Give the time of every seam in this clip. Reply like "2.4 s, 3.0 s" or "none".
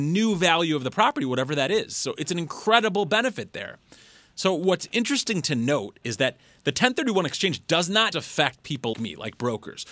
8.1 s, 8.9 s